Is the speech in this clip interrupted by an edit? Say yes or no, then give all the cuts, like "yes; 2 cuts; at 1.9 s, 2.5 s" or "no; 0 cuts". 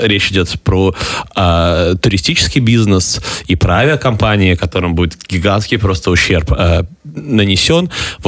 no; 0 cuts